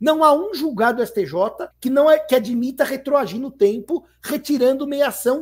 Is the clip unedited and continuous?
no; 1 cut; at 1.7 s

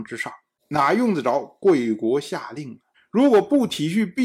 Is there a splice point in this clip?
yes; 1 cut; at 2.9 s

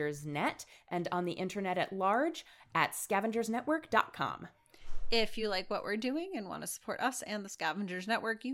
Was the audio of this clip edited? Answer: no; 0 cuts

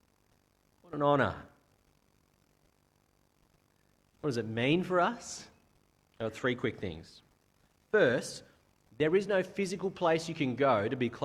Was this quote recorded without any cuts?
yes; 0 cuts

